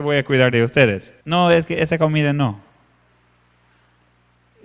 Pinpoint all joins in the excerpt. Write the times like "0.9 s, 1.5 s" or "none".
1.2 s